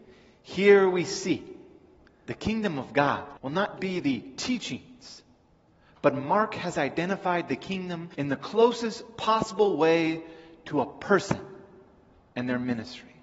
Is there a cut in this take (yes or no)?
yes